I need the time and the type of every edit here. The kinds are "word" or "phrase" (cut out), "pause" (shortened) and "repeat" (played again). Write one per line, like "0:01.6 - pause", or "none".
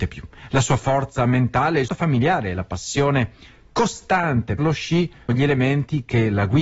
0:01.9 - word
0:04.6 - word
0:05.3 - word